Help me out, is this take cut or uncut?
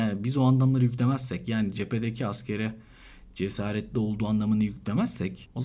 uncut